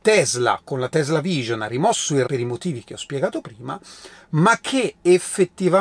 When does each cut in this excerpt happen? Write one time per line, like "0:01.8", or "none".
0:02.3